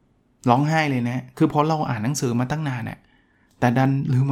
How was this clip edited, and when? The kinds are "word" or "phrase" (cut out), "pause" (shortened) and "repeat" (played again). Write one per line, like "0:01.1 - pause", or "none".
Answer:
none